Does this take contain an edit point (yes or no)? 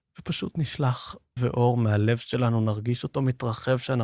yes